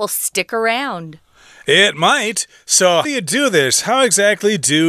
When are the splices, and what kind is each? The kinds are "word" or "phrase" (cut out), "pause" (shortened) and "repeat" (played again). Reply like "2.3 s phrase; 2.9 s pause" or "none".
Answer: 3.0 s word